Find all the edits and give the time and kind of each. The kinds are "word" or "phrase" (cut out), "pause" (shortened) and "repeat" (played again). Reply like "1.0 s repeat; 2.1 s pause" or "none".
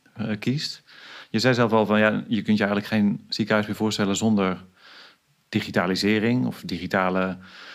none